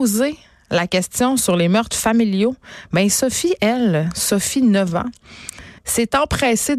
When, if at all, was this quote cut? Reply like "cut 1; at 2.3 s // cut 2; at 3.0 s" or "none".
cut 1; at 5.8 s